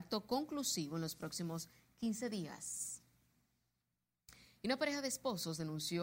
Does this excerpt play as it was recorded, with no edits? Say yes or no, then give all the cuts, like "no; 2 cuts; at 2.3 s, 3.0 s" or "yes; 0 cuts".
yes; 0 cuts